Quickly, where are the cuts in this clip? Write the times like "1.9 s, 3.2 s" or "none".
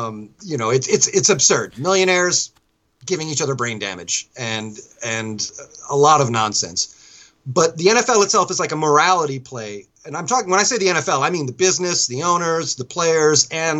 none